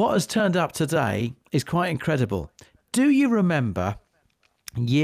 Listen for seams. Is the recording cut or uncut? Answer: uncut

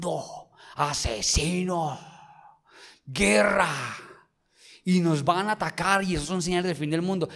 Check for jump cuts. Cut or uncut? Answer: uncut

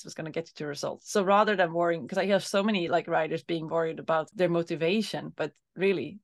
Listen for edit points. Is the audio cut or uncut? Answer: uncut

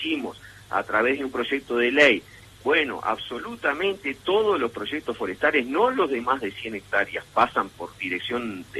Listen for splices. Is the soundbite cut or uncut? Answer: uncut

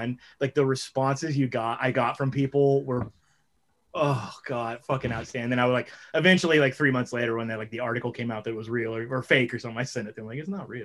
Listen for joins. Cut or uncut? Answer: uncut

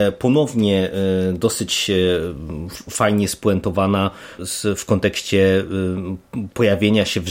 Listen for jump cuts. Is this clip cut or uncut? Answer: uncut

